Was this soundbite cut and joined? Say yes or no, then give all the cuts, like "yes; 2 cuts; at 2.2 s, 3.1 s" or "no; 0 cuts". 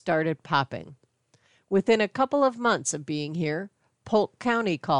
no; 0 cuts